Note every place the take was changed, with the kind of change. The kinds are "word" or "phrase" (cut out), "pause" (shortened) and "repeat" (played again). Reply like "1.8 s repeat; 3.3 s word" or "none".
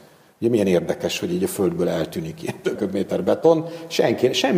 2.8 s word

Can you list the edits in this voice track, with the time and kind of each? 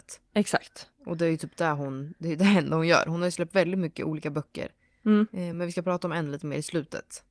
none

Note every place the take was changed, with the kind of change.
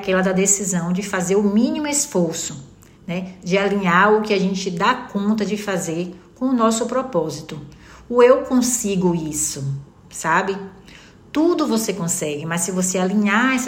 none

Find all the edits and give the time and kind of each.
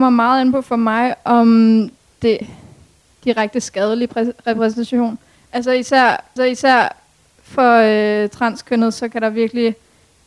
2.4 s word; 6.4 s repeat

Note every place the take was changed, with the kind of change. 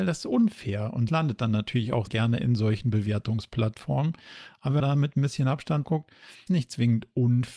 1.1 s word; 2.1 s word; 4.8 s word; 5.8 s word; 6.5 s word

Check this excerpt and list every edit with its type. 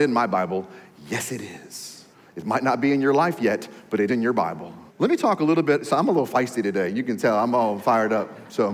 2.1 s pause; 4.1 s word; 4.9 s pause

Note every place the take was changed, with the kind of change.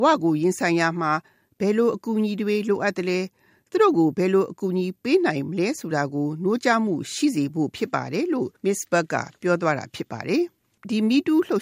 8.6 s pause

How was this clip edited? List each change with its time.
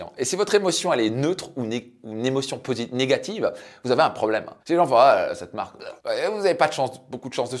4.6 s pause; 6.0 s pause

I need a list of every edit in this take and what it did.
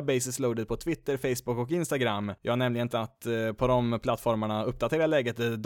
2.9 s word

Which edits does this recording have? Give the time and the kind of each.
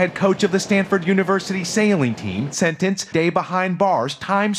3.1 s phrase

